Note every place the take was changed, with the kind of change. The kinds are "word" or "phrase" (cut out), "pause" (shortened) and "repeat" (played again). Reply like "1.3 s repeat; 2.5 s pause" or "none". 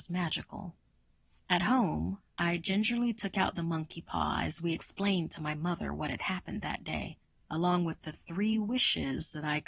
none